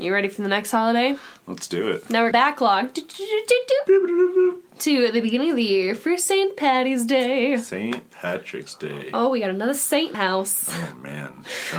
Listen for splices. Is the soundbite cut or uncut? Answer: cut